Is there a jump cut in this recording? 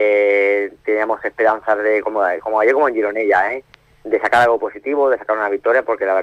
no; 0 cuts

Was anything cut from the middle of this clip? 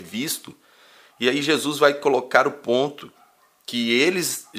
no; 0 cuts

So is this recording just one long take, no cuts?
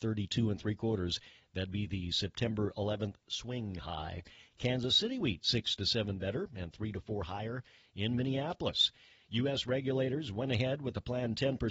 yes; 0 cuts

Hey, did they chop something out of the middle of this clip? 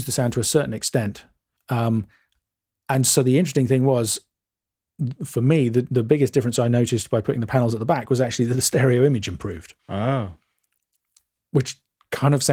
yes; 2 cuts; at 1.6 s, 9.8 s

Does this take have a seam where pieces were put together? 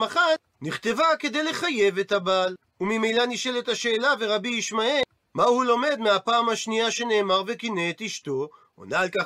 no; 0 cuts

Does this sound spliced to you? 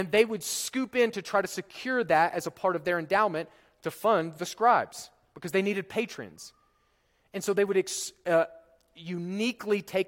no; 0 cuts

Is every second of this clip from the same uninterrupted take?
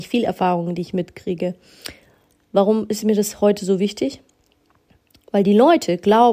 yes; 0 cuts

